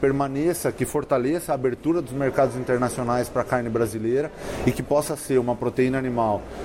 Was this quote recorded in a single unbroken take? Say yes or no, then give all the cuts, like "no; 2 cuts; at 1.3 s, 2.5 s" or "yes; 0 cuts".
yes; 0 cuts